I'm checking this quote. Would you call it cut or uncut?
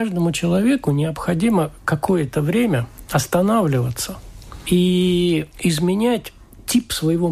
uncut